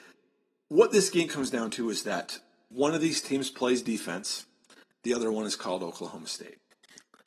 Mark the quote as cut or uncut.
uncut